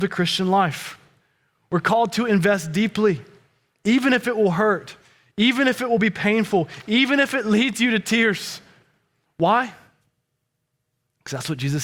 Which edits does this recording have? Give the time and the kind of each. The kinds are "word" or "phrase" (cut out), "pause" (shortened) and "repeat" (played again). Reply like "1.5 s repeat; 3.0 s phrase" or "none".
none